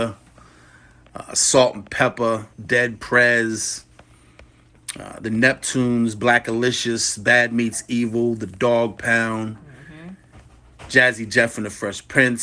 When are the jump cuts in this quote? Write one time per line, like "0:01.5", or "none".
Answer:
0:02.5